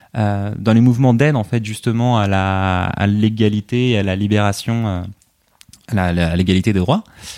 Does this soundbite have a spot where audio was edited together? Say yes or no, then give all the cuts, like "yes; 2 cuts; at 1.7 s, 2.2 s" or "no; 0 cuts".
no; 0 cuts